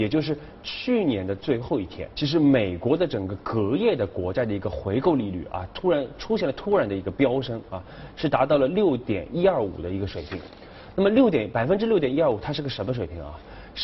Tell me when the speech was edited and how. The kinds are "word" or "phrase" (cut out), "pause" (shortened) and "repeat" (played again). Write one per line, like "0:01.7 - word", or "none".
0:02.1 - word